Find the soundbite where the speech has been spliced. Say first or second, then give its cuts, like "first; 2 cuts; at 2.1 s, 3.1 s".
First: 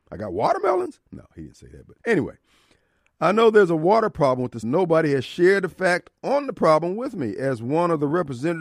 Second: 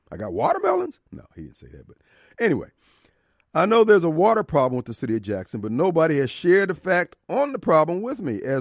first; 2 cuts; at 2.0 s, 4.6 s